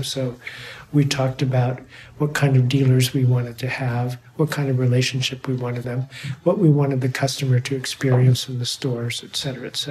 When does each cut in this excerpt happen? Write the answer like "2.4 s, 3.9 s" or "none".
5.8 s